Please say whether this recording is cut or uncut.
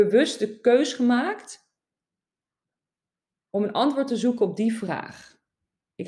uncut